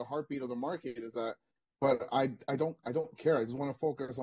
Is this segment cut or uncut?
uncut